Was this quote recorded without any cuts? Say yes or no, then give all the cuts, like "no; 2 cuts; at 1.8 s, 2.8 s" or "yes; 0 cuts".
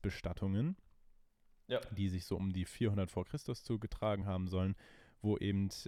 yes; 0 cuts